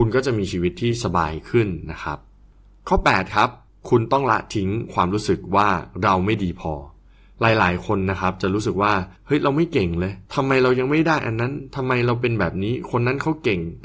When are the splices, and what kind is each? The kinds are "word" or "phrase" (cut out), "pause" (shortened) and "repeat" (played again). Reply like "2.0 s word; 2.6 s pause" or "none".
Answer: 2.4 s pause; 3.7 s pause; 9.2 s pause; 10.3 s pause